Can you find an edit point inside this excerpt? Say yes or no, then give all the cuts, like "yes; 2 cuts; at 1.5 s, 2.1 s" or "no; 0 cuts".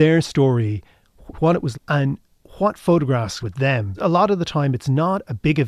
yes; 4 cuts; at 1.3 s, 1.7 s, 3.4 s, 3.9 s